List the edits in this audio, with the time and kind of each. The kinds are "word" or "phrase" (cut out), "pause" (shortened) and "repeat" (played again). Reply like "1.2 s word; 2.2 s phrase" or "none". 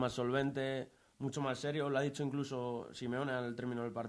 none